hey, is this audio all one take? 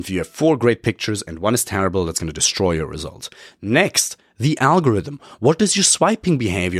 yes; 0 cuts

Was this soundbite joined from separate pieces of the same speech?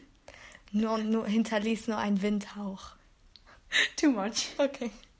no; 0 cuts

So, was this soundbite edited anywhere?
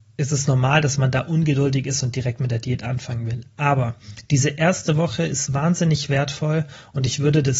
no; 0 cuts

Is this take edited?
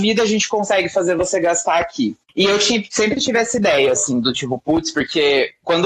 yes; 1 cut; at 2.2 s

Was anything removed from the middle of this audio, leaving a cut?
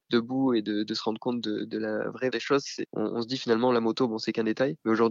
yes; 1 cut; at 2.3 s

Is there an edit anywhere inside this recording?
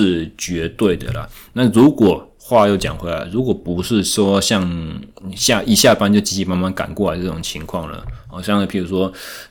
no; 0 cuts

